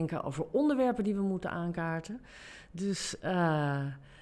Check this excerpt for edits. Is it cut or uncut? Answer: uncut